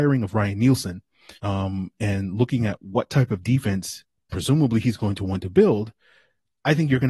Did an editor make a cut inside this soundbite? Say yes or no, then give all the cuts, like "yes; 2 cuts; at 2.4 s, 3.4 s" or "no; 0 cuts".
yes; 1 cut; at 1.4 s